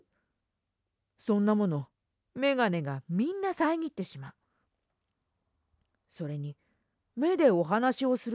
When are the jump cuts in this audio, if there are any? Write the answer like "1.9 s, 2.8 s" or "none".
none